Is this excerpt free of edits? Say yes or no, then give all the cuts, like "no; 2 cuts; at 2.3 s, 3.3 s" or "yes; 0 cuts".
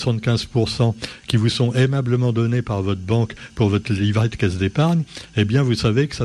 yes; 0 cuts